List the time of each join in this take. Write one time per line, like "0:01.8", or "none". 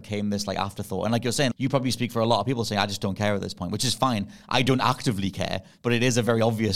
0:01.5